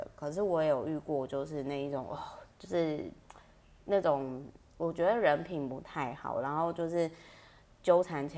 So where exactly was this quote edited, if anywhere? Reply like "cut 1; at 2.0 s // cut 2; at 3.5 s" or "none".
cut 1; at 2.5 s